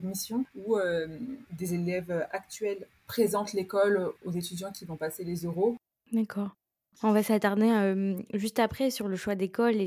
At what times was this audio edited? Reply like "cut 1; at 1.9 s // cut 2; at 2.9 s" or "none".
none